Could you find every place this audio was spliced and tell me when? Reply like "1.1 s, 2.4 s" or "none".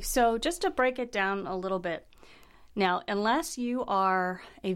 none